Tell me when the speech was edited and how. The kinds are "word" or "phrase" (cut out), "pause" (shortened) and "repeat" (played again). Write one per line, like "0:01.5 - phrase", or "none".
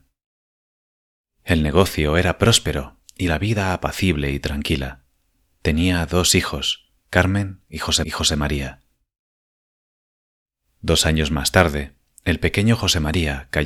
0:08.0 - repeat